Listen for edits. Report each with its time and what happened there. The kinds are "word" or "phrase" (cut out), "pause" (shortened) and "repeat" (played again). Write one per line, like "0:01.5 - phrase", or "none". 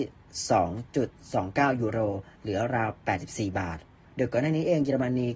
0:04.0 - pause